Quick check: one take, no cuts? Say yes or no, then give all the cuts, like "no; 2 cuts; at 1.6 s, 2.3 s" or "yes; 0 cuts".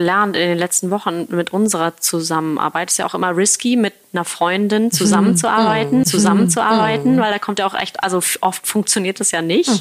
no; 1 cut; at 6.0 s